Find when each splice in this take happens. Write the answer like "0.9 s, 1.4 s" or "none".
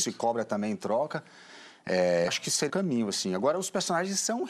2.3 s, 2.7 s